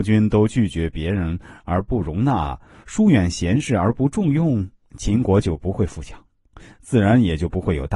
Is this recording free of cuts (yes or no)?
yes